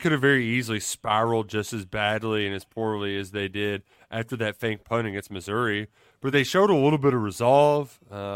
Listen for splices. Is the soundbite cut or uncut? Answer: uncut